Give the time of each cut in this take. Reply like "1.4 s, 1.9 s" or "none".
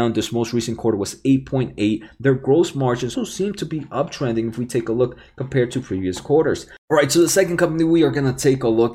3.1 s